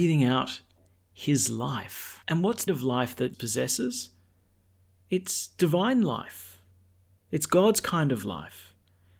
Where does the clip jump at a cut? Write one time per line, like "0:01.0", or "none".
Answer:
0:02.2
0:02.7
0:03.3